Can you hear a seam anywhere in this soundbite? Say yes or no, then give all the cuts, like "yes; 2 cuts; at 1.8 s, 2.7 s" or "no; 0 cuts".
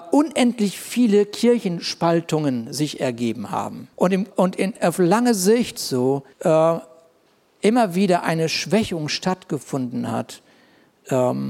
yes; 3 cuts; at 3.9 s, 4.3 s, 6.3 s